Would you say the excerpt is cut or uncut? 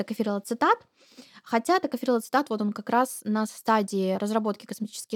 uncut